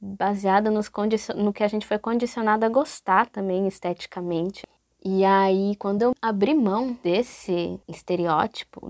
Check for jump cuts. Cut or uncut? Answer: uncut